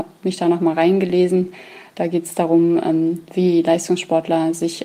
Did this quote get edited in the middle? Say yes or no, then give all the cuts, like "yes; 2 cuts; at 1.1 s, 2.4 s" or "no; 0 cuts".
no; 0 cuts